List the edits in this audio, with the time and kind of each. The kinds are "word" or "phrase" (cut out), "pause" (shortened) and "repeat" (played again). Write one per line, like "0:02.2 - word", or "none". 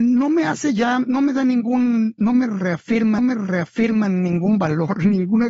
0:03.2 - repeat